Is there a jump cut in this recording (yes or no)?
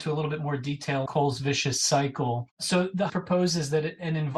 yes